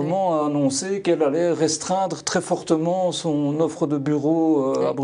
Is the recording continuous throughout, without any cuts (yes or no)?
yes